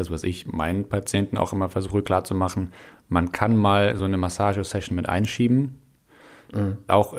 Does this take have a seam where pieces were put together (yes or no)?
no